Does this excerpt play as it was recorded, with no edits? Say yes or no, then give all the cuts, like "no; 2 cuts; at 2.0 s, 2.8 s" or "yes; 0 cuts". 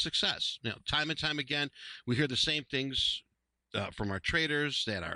yes; 0 cuts